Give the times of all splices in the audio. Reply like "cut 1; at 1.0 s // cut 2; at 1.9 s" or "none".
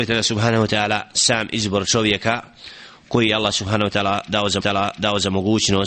cut 1; at 4.6 s